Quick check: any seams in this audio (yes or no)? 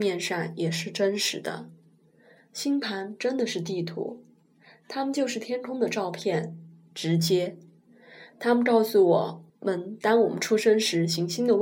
yes